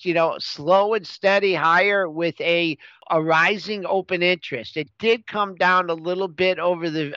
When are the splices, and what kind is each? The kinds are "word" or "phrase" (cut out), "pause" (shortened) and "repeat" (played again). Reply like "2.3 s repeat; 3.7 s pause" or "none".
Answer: none